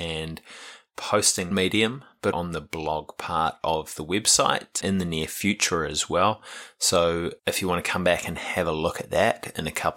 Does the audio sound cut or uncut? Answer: cut